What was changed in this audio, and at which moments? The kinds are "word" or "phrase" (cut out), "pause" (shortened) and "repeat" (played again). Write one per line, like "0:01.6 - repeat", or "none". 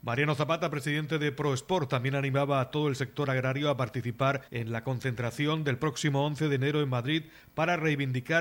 0:04.5 - pause